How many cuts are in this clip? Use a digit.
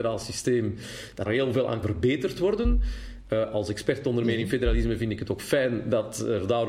2